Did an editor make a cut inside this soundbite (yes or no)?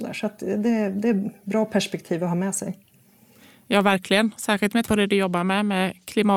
yes